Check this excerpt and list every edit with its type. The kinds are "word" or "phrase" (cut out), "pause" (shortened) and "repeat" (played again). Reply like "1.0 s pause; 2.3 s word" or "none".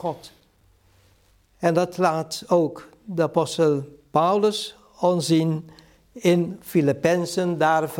none